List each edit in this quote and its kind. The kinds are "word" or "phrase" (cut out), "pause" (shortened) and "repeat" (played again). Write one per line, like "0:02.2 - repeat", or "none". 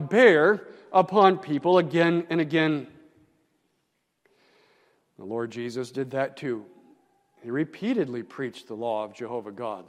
none